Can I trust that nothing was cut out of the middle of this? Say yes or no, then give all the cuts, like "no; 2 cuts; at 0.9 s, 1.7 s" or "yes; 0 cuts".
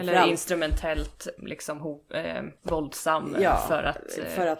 no; 2 cuts; at 1.4 s, 2.6 s